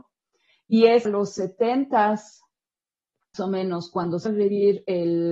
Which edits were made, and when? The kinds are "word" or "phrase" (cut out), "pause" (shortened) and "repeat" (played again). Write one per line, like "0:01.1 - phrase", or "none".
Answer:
0:01.1 - word
0:03.3 - word
0:04.3 - phrase